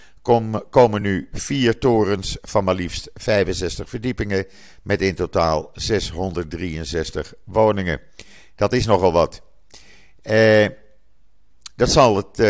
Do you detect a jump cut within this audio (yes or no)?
no